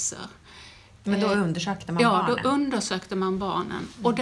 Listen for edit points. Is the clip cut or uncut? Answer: uncut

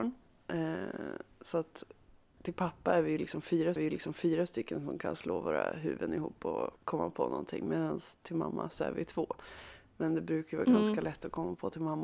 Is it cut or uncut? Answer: cut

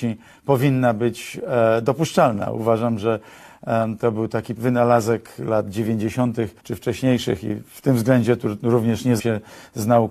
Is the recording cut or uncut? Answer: cut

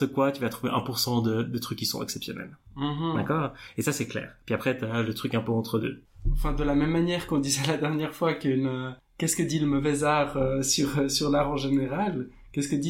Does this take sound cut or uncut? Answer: uncut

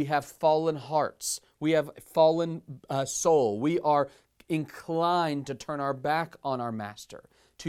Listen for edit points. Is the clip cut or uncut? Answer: uncut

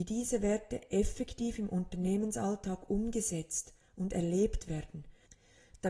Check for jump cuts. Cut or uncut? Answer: uncut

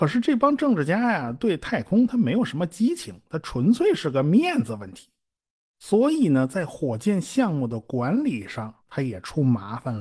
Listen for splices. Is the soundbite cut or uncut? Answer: cut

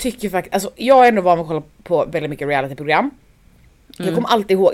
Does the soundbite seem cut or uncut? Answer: uncut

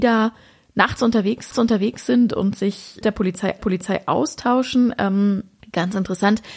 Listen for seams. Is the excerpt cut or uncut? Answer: cut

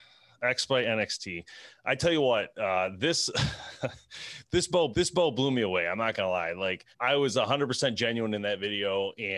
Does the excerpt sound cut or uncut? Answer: cut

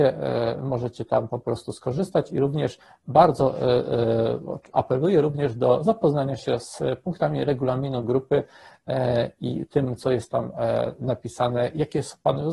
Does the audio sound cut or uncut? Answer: uncut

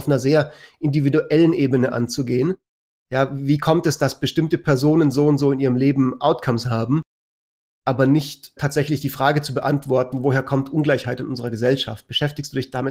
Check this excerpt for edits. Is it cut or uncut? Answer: cut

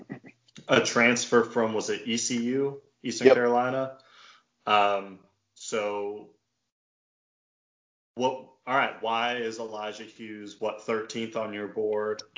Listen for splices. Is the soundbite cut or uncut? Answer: uncut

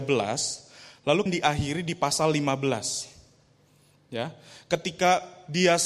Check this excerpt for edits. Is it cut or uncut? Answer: cut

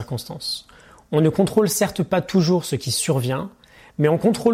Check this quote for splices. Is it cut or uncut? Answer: uncut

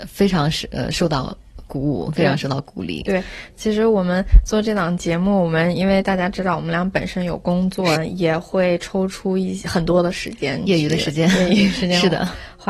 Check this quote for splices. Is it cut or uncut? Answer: cut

